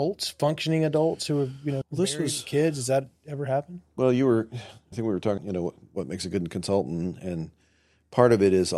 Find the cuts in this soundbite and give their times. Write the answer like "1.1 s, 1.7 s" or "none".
1.8 s, 4.9 s, 5.4 s